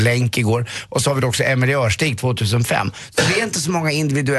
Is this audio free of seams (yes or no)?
yes